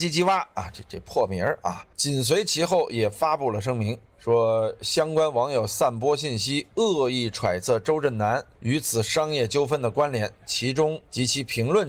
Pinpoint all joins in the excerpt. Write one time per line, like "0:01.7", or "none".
0:01.9
0:04.1